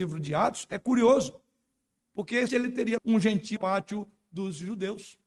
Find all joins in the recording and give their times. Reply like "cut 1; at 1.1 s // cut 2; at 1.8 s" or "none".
cut 1; at 2.5 s // cut 2; at 3.0 s // cut 3; at 3.6 s